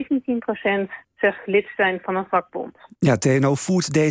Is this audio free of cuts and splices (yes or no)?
yes